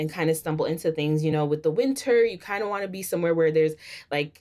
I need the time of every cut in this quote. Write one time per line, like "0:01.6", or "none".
none